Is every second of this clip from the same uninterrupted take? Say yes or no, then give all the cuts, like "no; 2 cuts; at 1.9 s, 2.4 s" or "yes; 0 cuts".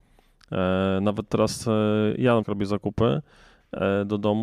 no; 1 cut; at 2.4 s